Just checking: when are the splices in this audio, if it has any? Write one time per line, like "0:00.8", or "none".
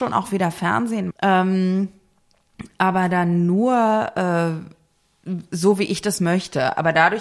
0:01.1